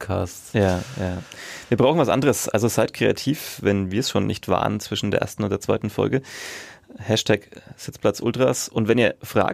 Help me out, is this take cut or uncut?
uncut